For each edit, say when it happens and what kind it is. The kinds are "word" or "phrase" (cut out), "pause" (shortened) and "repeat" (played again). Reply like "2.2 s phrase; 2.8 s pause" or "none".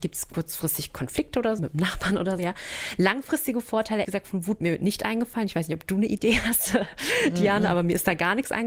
1.6 s word; 2.4 s word; 4.0 s word; 4.6 s word